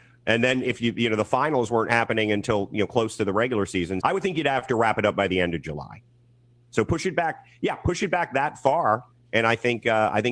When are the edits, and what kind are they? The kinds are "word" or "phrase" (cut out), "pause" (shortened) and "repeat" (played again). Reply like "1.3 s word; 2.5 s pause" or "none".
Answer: 4.0 s word